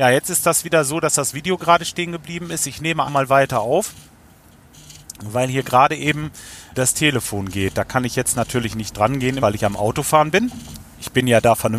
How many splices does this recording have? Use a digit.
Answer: 3